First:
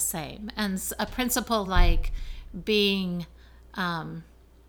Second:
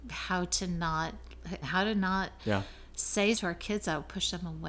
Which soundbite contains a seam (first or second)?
second